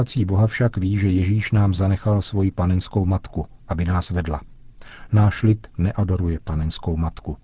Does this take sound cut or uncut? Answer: uncut